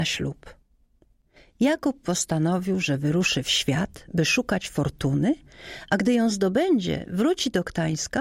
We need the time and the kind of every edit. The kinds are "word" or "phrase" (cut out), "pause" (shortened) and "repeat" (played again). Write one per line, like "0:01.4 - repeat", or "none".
none